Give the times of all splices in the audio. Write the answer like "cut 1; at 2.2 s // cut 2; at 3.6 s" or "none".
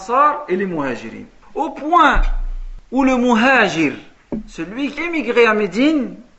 cut 1; at 5.0 s